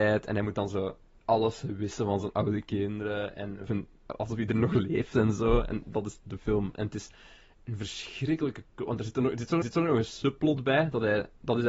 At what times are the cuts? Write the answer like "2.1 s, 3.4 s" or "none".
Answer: 3.7 s, 9.6 s